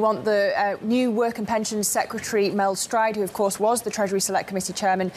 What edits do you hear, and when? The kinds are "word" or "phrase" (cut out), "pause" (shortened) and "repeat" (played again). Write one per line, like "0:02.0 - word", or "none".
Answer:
none